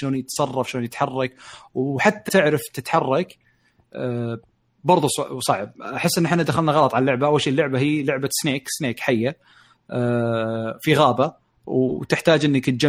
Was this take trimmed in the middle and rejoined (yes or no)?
yes